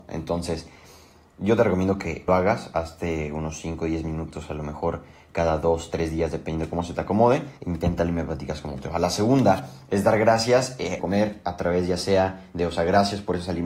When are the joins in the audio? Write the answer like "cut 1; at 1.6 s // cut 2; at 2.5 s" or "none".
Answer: cut 1; at 2.3 s // cut 2; at 7.6 s // cut 3; at 11.0 s

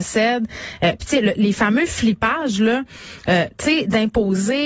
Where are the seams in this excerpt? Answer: none

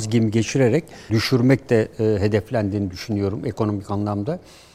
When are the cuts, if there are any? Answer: cut 1; at 1.1 s

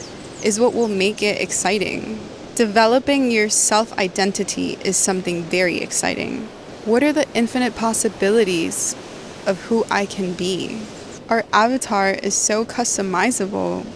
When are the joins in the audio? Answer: none

